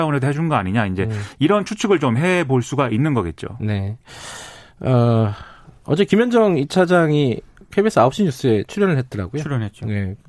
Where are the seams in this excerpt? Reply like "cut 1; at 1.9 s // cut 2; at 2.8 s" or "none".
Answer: none